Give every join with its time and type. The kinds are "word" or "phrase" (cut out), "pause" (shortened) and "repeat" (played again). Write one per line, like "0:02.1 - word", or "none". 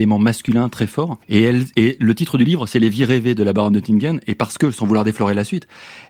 0:01.2 - pause

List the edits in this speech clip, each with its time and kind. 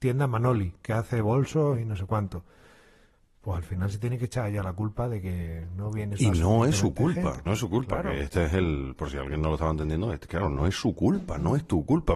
0:07.5 - phrase

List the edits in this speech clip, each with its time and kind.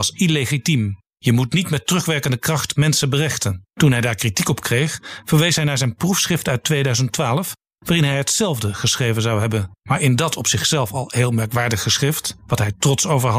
0:01.1 - pause
0:03.7 - pause
0:09.8 - pause

